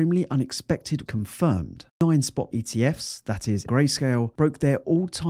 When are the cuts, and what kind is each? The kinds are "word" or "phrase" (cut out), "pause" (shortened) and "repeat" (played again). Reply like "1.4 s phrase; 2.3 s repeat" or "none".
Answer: 1.1 s word; 2.5 s word; 3.7 s word